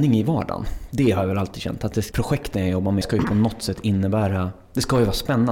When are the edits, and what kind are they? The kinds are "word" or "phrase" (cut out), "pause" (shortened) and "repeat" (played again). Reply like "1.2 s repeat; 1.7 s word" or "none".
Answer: 2.1 s word; 3.0 s phrase